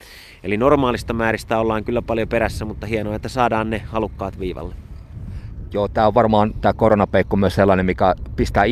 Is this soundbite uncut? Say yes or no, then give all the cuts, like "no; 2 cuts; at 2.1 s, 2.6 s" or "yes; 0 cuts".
yes; 0 cuts